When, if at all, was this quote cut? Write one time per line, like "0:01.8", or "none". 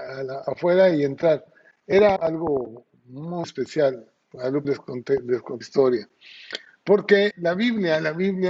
0:02.2
0:03.4
0:04.6
0:05.6
0:07.3